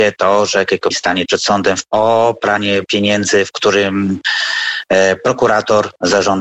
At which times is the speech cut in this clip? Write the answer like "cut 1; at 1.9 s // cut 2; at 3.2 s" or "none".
cut 1; at 0.9 s // cut 2; at 1.3 s // cut 3; at 1.9 s // cut 4; at 2.8 s